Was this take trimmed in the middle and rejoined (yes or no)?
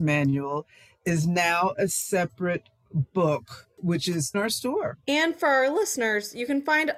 yes